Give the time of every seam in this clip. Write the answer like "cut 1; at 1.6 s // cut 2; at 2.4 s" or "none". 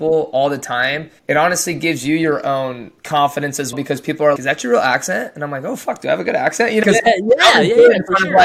cut 1; at 1.2 s // cut 2; at 3.0 s // cut 3; at 3.7 s // cut 4; at 4.4 s // cut 5; at 6.8 s